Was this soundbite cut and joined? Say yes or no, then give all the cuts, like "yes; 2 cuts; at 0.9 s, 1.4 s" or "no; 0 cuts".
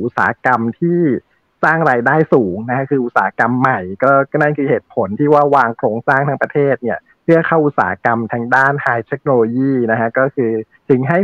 no; 0 cuts